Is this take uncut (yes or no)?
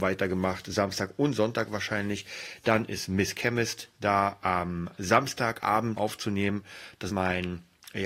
no